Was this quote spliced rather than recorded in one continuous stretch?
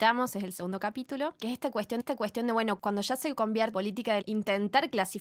yes; 3 cuts; at 2.0 s, 3.7 s, 4.2 s

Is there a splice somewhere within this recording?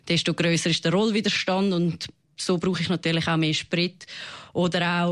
no; 0 cuts

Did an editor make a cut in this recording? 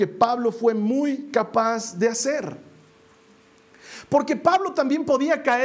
no; 0 cuts

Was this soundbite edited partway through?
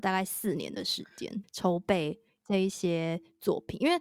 yes; 1 cut; at 1.4 s

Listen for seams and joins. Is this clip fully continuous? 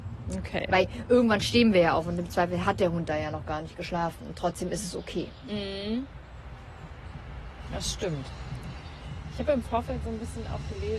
yes; 0 cuts

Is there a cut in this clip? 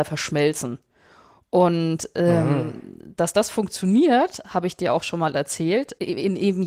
no; 0 cuts

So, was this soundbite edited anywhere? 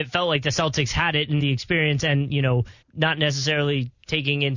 yes; 2 cuts; at 1.4 s, 2.8 s

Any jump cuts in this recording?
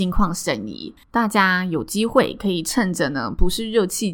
yes; 1 cut; at 1.0 s

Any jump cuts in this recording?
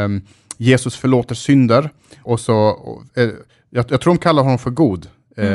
yes; 1 cut; at 2.3 s

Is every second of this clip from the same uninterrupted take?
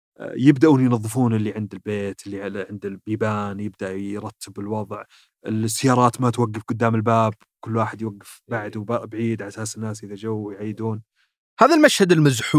yes; 0 cuts

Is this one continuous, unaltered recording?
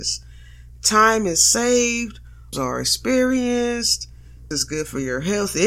no; 2 cuts; at 2.5 s, 4.5 s

